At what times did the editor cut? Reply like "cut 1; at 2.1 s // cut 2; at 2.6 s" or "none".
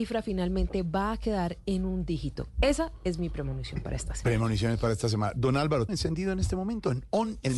cut 1; at 5.9 s